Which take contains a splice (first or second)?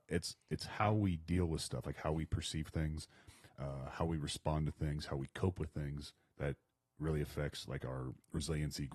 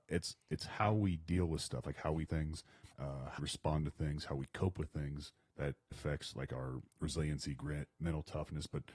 second